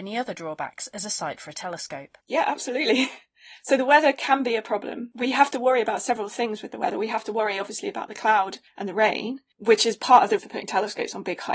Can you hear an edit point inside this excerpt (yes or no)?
yes